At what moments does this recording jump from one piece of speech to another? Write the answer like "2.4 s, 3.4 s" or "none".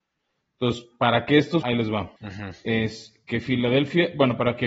1.6 s, 2.2 s